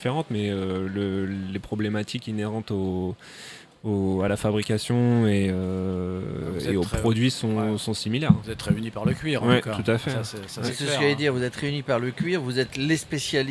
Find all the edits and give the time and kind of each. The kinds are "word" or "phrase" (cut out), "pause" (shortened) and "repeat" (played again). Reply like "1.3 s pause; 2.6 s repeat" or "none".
none